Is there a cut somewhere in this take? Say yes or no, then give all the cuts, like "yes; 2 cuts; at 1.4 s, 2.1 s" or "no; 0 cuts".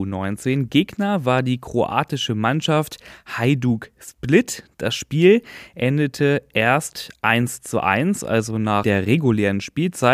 no; 0 cuts